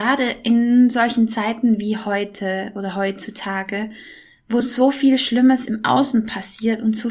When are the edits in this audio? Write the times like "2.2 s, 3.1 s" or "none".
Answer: none